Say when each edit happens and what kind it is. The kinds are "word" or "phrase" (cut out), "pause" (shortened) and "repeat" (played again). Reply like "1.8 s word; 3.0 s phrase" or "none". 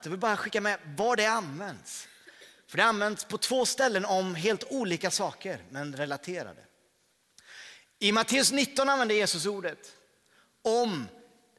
none